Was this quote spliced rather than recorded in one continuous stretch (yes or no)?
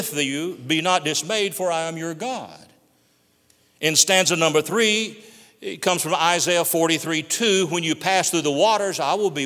no